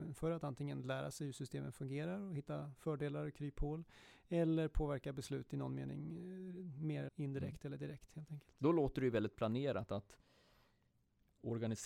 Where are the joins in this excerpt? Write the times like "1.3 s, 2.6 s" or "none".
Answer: 7.1 s